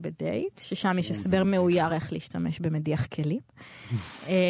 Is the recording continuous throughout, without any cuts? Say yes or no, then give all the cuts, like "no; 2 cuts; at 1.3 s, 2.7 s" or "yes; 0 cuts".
yes; 0 cuts